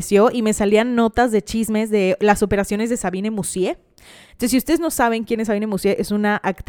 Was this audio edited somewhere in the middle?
no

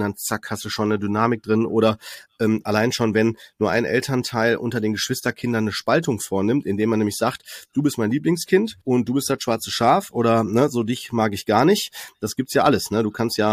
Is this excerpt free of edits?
no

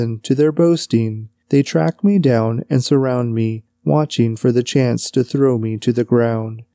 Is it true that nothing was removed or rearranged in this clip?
yes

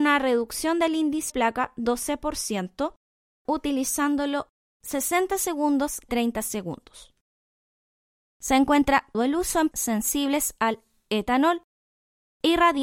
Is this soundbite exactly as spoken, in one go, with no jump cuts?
no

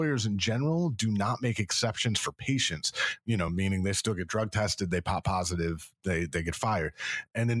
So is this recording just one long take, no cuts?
yes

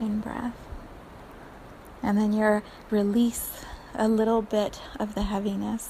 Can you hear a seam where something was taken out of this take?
yes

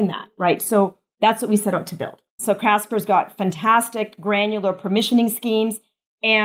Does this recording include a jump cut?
yes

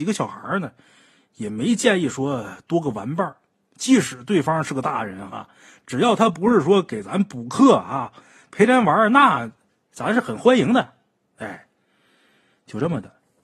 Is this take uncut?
yes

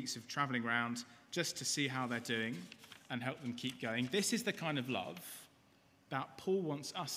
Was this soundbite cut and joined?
no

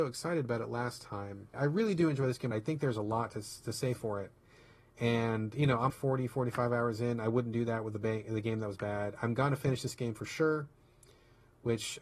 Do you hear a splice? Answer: yes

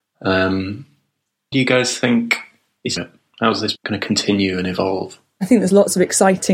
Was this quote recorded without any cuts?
no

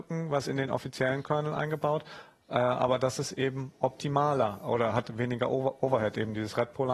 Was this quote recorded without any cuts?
yes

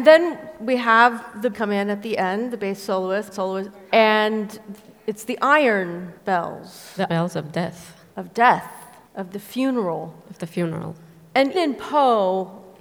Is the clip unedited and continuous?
no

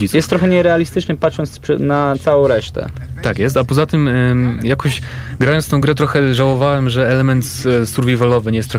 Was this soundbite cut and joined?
no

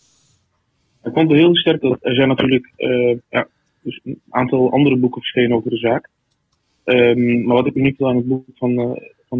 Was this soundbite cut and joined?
yes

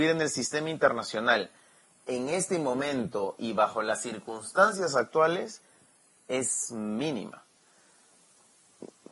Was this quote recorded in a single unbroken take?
yes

